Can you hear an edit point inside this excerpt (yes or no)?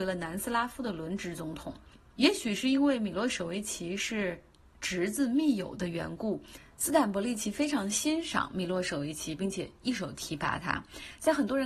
no